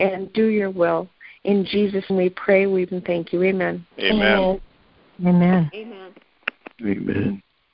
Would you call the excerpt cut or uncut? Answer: cut